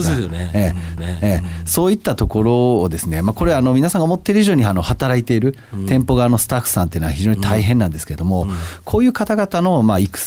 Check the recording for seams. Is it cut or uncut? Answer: cut